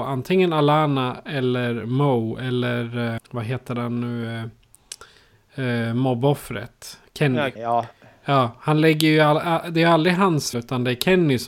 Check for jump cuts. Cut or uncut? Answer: cut